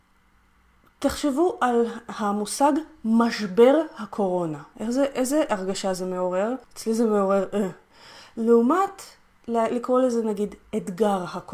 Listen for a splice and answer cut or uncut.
cut